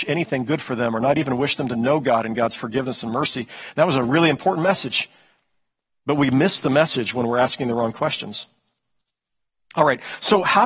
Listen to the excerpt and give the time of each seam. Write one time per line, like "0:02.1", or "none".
none